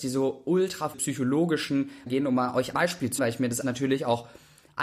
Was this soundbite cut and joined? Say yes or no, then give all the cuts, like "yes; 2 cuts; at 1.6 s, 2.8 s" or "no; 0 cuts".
yes; 5 cuts; at 0.9 s, 2.1 s, 2.7 s, 3.2 s, 3.6 s